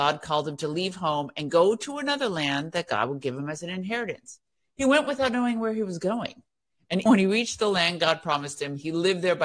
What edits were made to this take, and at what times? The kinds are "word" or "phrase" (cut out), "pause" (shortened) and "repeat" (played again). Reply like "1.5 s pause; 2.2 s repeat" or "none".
7.1 s word